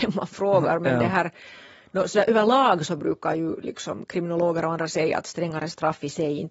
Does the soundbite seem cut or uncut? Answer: uncut